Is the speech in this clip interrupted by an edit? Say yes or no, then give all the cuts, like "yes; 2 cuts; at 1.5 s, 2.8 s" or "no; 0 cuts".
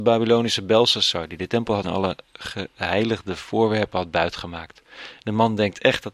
yes; 1 cut; at 1.8 s